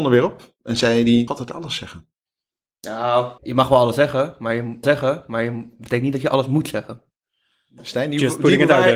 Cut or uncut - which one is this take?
cut